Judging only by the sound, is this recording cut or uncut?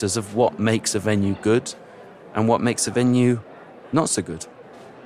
uncut